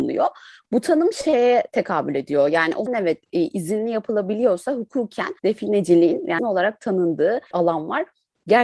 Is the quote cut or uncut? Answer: cut